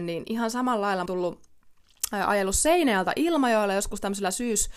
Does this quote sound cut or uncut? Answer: cut